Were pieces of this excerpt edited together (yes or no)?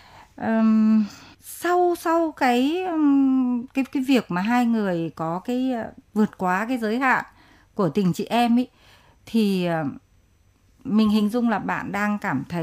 no